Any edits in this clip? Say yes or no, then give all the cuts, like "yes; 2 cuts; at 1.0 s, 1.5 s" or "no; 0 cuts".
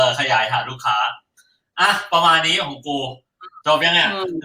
no; 0 cuts